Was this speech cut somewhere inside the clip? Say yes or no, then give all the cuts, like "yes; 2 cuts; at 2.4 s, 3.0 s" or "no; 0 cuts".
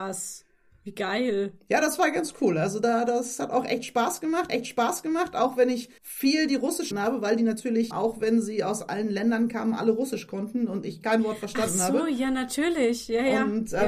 yes; 4 cuts; at 4.5 s, 6.0 s, 6.9 s, 7.9 s